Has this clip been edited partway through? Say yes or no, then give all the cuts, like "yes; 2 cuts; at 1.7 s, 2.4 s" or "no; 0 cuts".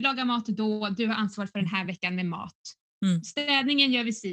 no; 0 cuts